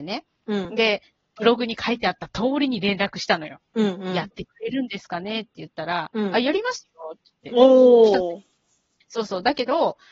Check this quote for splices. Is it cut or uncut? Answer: uncut